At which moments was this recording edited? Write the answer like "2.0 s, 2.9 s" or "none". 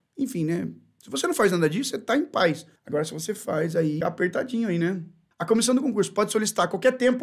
2.8 s, 4.0 s